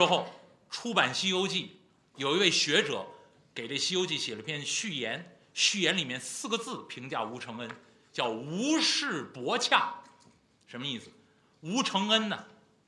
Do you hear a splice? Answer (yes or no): no